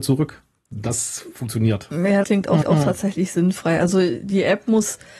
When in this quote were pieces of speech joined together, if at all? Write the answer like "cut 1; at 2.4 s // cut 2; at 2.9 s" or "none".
cut 1; at 1.4 s // cut 2; at 2.2 s // cut 3; at 2.6 s